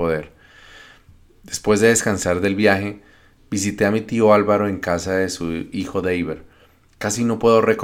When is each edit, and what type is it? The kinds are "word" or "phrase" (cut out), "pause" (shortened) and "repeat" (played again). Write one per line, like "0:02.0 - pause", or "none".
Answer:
none